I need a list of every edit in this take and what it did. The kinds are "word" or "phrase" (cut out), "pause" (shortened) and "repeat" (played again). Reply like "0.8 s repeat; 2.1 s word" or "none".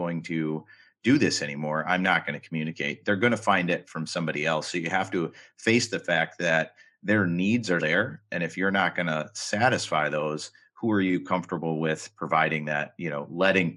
7.8 s word